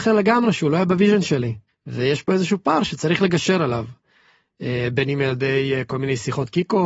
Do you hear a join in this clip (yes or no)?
yes